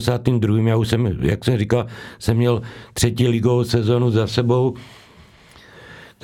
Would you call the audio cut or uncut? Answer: uncut